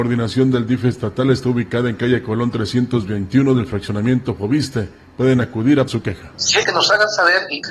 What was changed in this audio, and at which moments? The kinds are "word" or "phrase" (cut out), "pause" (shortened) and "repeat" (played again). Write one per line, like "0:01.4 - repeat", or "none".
0:05.9 - word
0:06.6 - word